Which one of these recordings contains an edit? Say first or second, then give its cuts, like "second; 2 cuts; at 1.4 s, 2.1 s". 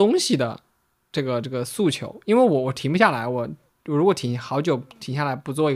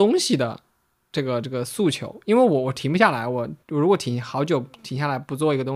second; 1 cut; at 3.6 s